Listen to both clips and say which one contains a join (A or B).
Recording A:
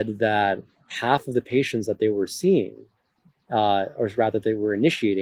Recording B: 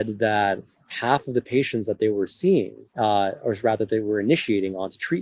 B